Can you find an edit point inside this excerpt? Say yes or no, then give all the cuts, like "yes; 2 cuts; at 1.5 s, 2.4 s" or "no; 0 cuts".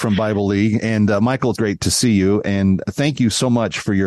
yes; 1 cut; at 1.6 s